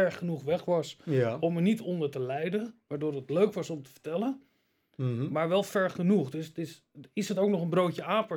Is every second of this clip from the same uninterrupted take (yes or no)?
yes